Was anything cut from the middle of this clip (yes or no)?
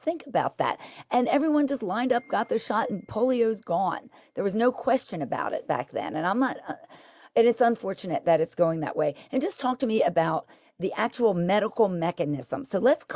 no